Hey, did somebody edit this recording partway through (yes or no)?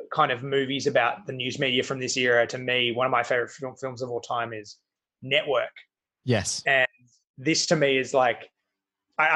no